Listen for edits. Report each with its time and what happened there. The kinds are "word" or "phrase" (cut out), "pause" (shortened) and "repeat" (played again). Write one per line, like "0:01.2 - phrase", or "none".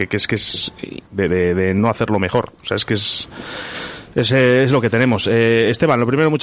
0:01.0 - word